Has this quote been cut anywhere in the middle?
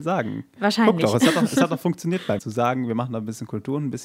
yes; 1 cut; at 2.4 s

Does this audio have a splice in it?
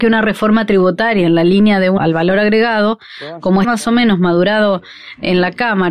yes; 2 cuts; at 2.0 s, 3.6 s

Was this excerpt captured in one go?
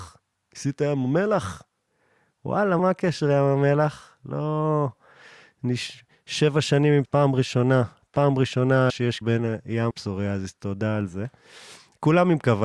no; 5 cuts; at 2.8 s, 7.0 s, 8.9 s, 9.2 s, 9.9 s

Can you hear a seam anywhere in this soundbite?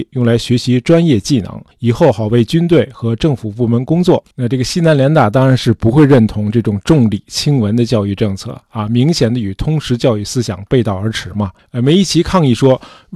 yes; 3 cuts; at 1.7 s, 4.3 s, 11.6 s

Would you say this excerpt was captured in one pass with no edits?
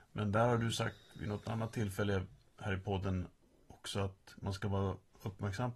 yes; 0 cuts

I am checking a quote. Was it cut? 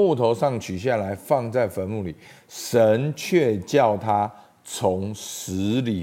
no; 0 cuts

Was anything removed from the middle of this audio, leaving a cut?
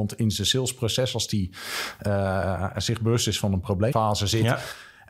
yes; 1 cut; at 3.9 s

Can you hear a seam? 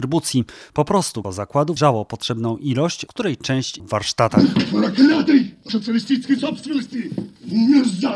yes; 5 cuts; at 1.2 s, 1.8 s, 3.1 s, 3.8 s, 5.7 s

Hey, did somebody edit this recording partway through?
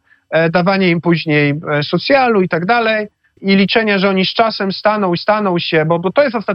yes; 2 cuts; at 3.4 s, 5.2 s

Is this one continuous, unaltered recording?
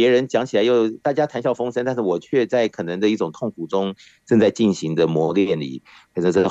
yes; 0 cuts

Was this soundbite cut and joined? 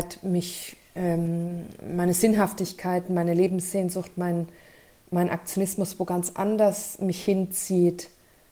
no; 0 cuts

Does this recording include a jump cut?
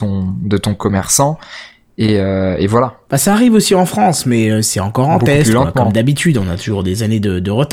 no; 0 cuts

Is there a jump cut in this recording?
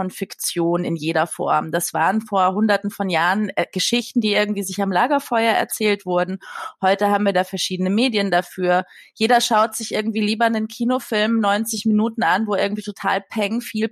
no; 0 cuts

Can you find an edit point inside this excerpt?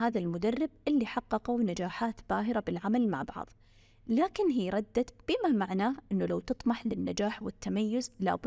no; 0 cuts

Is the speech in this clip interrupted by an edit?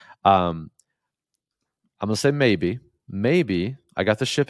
no; 0 cuts

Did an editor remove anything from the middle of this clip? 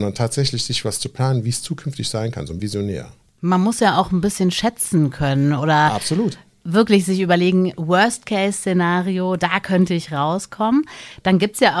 yes; 1 cut; at 2.6 s

